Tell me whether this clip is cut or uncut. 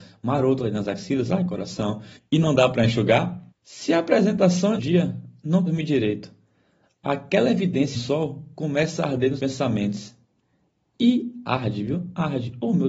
cut